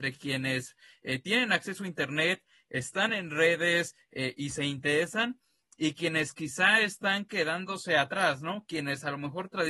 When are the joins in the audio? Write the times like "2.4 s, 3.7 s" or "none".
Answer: none